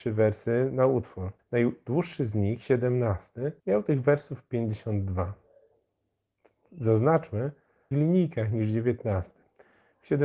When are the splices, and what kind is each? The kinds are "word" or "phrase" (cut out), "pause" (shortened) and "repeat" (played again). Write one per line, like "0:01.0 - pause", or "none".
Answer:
0:01.4 - pause
0:03.6 - pause
0:07.9 - phrase